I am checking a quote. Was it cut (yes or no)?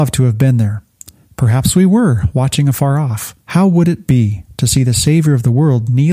yes